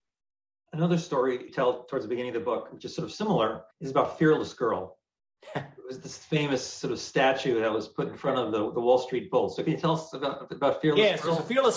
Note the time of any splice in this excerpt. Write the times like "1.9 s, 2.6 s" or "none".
1.5 s, 3.7 s